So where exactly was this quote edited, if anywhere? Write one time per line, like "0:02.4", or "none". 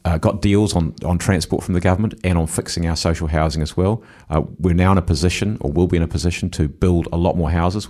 none